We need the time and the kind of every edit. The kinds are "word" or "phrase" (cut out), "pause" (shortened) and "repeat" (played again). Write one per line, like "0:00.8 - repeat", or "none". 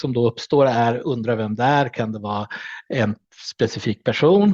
none